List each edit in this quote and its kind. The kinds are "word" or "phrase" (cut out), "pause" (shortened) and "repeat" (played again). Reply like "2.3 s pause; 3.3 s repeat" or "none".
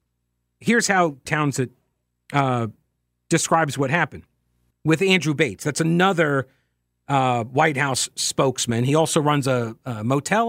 1.3 s word; 4.7 s word